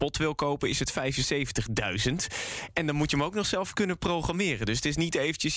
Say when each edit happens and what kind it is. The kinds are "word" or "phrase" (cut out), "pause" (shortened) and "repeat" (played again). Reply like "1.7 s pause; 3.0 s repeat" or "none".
none